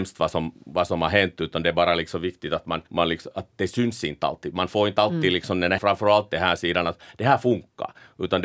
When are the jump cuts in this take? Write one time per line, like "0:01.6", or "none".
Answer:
0:02.9
0:05.8